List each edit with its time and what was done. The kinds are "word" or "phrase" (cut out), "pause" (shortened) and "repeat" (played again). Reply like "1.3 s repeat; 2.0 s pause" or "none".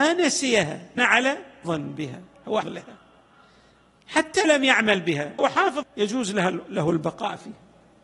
1.0 s word; 1.6 s word; 2.6 s word; 4.4 s word; 5.4 s word; 5.8 s word